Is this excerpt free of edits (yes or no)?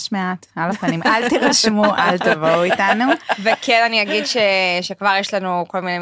yes